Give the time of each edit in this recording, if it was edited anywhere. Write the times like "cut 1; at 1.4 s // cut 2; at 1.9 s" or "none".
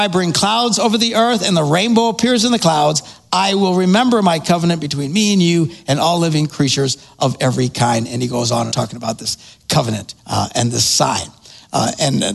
cut 1; at 8.7 s // cut 2; at 10.2 s